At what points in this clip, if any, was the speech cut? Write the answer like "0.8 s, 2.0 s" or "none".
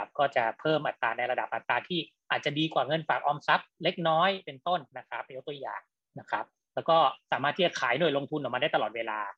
4.9 s